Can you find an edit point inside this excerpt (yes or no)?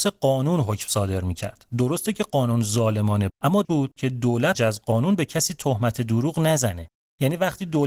yes